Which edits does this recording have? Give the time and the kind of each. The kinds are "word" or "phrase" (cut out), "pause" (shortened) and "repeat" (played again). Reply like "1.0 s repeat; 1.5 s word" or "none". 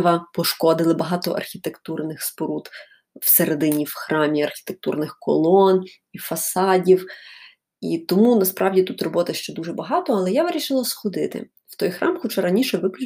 none